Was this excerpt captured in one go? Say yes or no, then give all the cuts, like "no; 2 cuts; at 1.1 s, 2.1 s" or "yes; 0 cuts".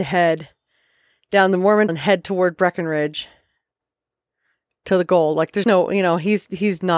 no; 2 cuts; at 1.9 s, 5.6 s